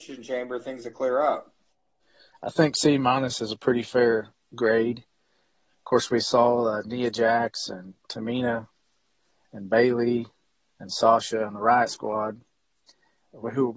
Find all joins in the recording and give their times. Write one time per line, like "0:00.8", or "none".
none

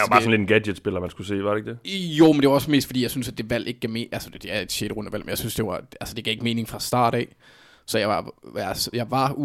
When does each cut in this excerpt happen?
none

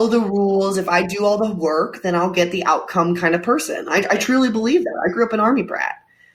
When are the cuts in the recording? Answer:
none

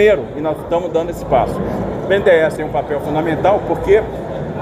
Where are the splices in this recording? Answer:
0:02.6

